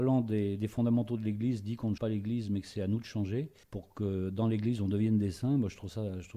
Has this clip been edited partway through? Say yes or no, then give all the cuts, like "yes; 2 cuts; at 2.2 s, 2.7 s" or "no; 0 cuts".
yes; 2 cuts; at 2.0 s, 3.6 s